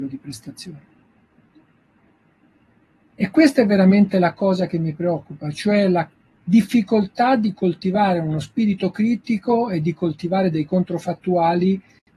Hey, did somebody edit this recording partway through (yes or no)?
no